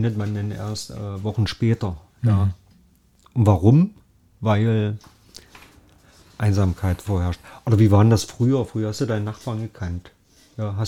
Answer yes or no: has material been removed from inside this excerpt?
no